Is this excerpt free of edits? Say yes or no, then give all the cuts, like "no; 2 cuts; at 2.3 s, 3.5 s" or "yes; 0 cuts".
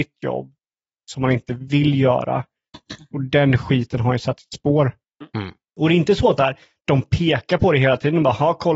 no; 2 cuts; at 5.7 s, 6.4 s